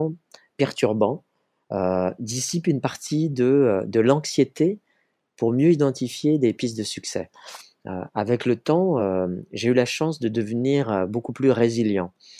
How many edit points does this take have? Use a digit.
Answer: 0